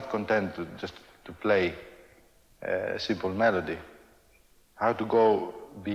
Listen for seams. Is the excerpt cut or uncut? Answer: uncut